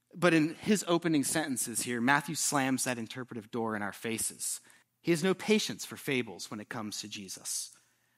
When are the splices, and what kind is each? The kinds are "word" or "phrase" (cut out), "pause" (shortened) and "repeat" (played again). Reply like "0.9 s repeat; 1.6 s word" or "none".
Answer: 4.8 s pause